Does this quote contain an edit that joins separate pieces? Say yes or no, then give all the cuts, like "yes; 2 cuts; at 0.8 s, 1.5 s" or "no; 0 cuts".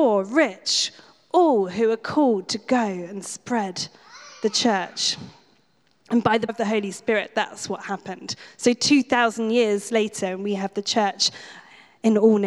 yes; 1 cut; at 6.5 s